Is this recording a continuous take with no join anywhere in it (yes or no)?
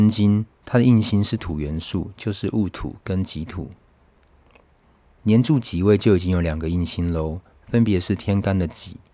yes